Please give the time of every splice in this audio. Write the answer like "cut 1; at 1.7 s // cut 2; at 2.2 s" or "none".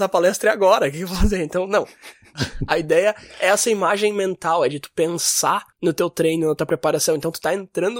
cut 1; at 5.7 s